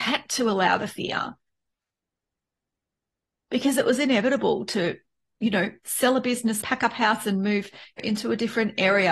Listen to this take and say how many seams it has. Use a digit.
2